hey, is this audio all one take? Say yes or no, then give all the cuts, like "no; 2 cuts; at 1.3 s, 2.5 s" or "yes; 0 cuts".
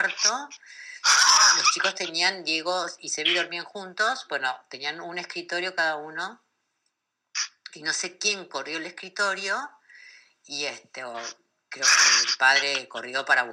yes; 0 cuts